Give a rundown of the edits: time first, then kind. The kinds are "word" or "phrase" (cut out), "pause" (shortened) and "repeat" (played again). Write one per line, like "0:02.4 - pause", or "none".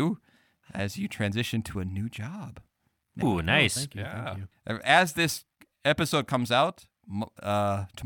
0:03.2 - word
0:04.5 - pause